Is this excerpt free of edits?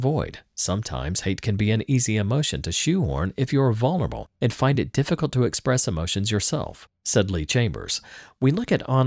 yes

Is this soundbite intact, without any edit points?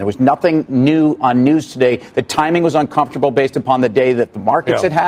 yes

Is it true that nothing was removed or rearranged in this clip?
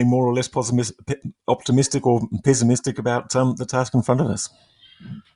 yes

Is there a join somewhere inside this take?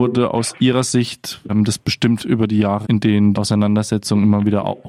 yes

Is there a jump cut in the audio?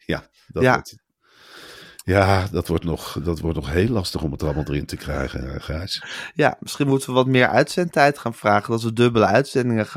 no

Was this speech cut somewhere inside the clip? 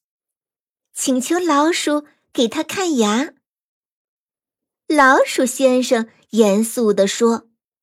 no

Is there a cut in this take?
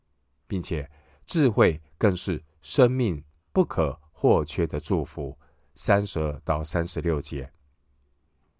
no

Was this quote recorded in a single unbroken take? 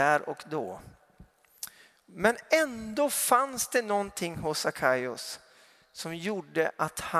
yes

